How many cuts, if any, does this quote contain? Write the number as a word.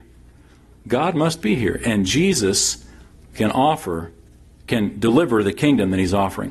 zero